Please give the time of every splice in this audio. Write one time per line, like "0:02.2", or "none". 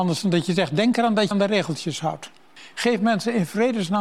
0:01.3